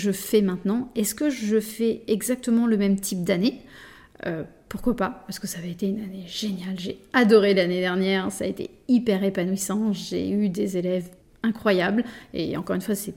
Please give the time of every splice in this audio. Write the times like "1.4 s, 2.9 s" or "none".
11.2 s